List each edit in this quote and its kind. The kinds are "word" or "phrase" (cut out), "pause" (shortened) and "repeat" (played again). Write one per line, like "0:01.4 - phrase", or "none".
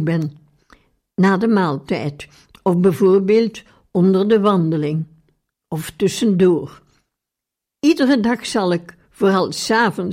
none